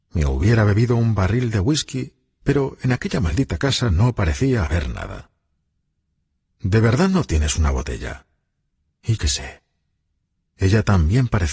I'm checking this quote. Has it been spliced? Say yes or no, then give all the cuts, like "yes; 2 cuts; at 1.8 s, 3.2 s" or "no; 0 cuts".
yes; 1 cut; at 9.2 s